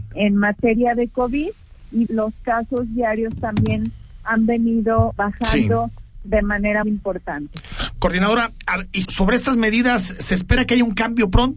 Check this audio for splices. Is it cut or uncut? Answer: cut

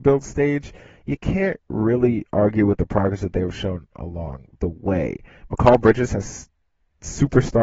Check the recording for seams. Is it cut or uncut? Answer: uncut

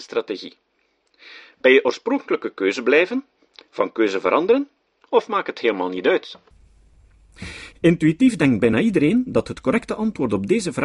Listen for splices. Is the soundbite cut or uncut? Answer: uncut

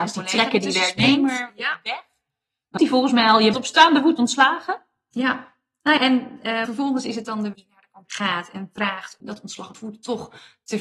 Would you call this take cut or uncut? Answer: cut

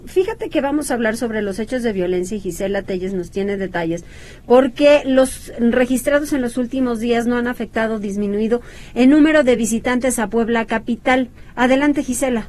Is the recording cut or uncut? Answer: uncut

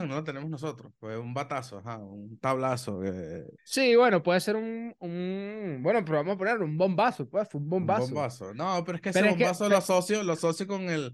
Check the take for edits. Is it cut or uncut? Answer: cut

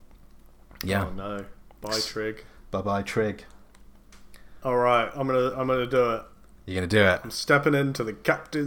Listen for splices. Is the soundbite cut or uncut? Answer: uncut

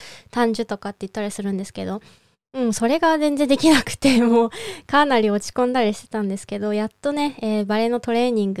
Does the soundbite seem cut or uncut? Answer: uncut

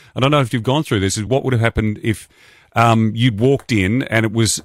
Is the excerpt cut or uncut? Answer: uncut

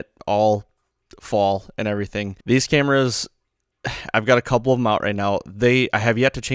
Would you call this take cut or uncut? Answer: cut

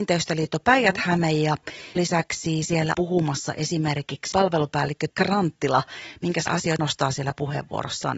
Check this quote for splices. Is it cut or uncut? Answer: cut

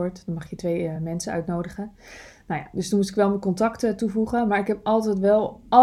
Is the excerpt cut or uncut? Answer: uncut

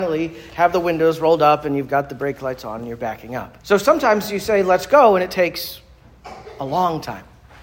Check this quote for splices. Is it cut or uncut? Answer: cut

